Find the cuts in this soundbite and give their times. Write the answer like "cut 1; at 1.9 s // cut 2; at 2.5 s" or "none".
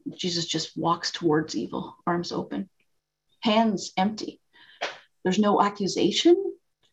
none